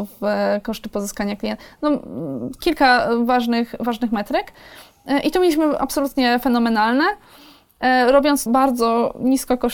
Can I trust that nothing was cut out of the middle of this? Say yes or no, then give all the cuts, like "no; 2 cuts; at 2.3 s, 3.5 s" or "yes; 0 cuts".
no; 1 cut; at 8.5 s